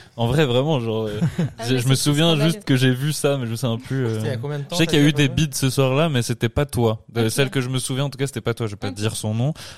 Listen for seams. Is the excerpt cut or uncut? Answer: uncut